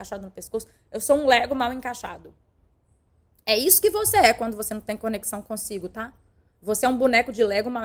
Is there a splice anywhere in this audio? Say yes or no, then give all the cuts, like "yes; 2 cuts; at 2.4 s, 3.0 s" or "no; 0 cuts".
no; 0 cuts